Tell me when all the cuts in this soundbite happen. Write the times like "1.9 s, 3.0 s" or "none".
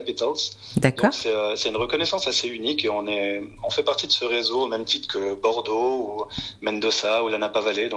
none